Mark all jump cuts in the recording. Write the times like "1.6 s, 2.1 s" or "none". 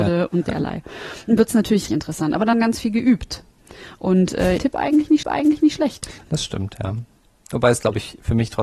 1.4 s, 1.9 s, 2.5 s, 4.6 s, 5.2 s